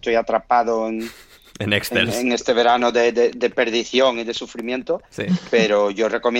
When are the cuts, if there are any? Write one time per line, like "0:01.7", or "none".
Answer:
none